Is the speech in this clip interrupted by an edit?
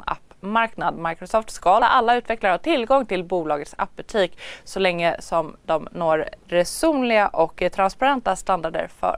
yes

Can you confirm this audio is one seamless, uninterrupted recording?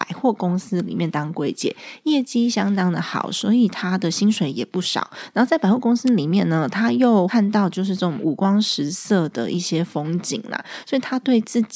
yes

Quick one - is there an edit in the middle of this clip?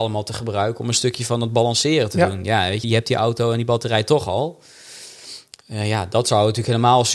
yes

